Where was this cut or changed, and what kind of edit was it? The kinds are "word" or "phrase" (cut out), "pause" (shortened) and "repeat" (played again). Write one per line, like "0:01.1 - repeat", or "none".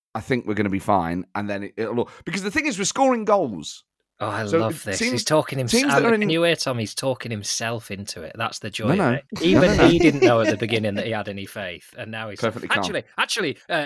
none